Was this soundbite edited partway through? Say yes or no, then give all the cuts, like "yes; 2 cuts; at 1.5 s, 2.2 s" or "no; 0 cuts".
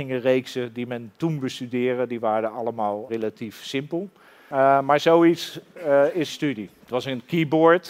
yes; 2 cuts; at 3.1 s, 6.3 s